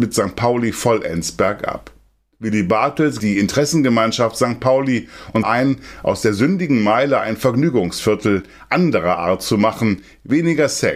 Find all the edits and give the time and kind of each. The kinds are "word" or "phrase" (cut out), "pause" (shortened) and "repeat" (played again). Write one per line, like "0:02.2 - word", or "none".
0:03.2 - word
0:05.4 - phrase